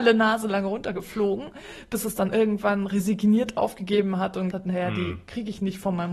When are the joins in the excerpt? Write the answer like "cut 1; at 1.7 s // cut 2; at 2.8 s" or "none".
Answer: cut 1; at 4.5 s